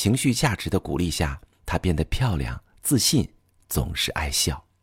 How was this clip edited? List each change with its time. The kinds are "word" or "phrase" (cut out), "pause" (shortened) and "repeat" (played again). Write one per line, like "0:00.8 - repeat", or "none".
none